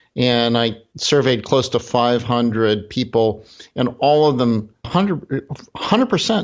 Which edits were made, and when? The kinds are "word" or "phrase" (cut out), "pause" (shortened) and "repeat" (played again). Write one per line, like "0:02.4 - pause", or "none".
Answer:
0:04.8 - word